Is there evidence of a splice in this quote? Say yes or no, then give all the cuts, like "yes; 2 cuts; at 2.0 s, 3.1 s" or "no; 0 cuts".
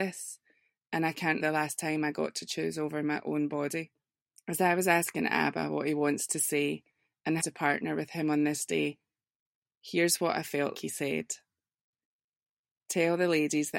yes; 4 cuts; at 1.4 s, 4.2 s, 7.4 s, 10.7 s